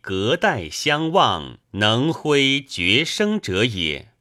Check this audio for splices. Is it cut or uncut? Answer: cut